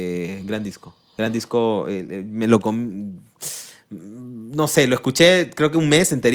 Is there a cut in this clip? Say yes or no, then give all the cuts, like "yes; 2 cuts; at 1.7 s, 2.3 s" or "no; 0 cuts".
no; 0 cuts